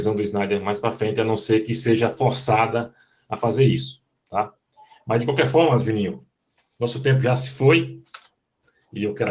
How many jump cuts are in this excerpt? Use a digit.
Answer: 0